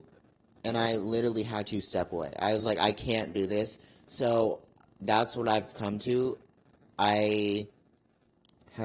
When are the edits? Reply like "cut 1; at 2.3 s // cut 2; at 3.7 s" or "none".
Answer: none